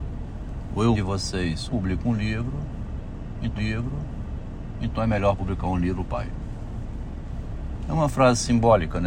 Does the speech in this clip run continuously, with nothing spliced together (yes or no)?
no